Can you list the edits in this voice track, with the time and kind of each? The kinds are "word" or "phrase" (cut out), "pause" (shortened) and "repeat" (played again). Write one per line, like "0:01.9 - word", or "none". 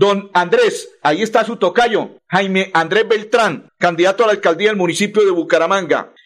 none